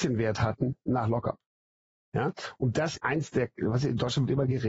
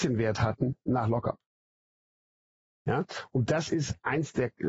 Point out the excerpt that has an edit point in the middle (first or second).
first